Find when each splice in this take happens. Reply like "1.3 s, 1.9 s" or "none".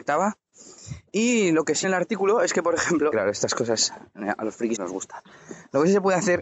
1.1 s, 1.8 s, 3.1 s, 4.8 s